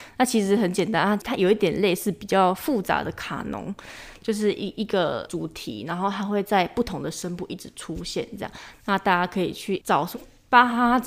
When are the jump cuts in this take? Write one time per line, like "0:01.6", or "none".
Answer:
0:10.1